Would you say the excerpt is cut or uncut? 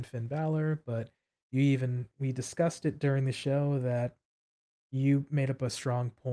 uncut